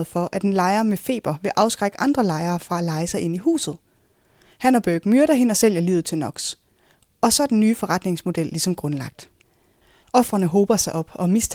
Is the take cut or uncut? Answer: uncut